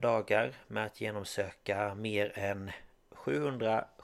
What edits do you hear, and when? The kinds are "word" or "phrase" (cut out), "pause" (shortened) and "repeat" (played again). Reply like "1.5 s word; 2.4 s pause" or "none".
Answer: none